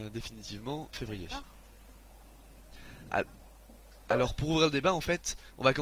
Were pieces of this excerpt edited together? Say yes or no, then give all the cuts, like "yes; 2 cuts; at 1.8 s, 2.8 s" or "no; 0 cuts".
yes; 1 cut; at 0.9 s